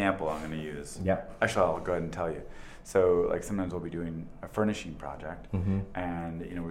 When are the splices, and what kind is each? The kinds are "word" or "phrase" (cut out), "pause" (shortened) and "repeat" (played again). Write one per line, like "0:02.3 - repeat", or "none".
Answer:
0:04.4 - word